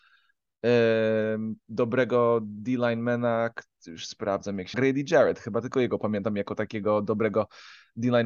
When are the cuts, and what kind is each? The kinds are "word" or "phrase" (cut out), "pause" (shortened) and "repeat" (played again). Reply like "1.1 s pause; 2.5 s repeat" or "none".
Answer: 1.6 s word; 4.7 s phrase